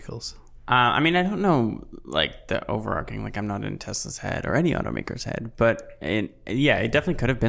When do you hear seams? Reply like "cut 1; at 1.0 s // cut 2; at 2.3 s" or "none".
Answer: none